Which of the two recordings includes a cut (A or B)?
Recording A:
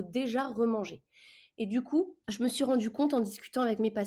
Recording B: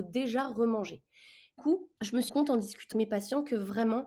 B